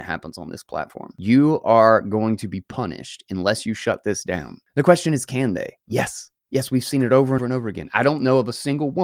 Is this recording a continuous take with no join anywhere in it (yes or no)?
no